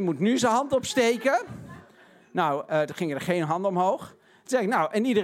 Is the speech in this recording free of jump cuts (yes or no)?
yes